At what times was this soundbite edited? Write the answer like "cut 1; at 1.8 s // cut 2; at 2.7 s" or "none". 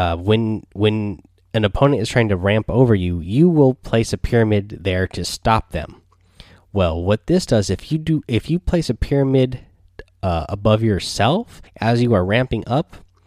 cut 1; at 11.7 s